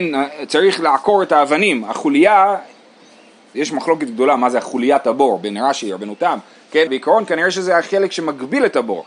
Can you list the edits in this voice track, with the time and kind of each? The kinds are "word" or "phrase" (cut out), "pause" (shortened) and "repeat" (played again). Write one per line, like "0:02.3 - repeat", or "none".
0:06.9 - word